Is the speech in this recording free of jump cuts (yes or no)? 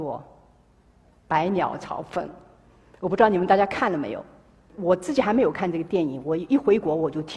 yes